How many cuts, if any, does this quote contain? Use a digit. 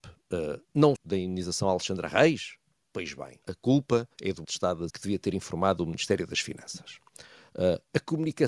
6